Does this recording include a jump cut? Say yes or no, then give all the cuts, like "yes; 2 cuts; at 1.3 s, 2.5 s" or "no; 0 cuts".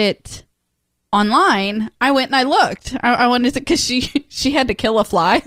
no; 0 cuts